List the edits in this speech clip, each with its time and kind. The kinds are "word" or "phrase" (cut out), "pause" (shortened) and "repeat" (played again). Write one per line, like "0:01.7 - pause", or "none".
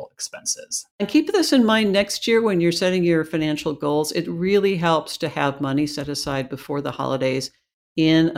0:00.9 - pause